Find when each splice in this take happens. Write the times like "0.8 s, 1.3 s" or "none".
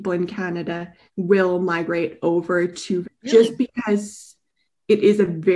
1.1 s, 3.0 s